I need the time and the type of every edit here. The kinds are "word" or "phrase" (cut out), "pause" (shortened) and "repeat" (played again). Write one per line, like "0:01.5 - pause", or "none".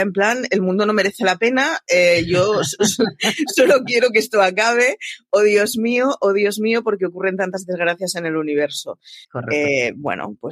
0:09.2 - pause